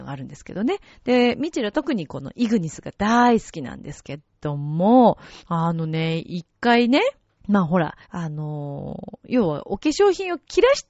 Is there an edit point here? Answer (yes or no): yes